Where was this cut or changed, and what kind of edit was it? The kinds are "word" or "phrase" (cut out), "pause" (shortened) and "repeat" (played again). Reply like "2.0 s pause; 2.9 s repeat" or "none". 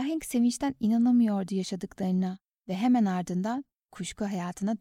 none